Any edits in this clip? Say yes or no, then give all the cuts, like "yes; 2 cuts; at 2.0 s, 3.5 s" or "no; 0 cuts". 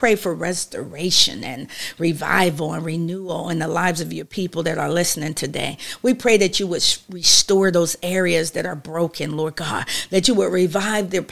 no; 0 cuts